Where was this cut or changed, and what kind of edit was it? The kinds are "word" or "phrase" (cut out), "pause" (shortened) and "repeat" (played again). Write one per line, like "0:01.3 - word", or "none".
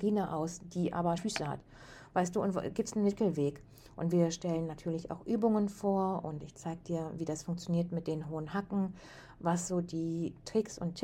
0:01.2 - word